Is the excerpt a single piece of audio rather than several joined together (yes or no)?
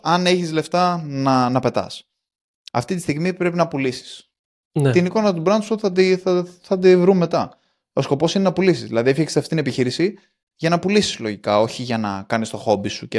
yes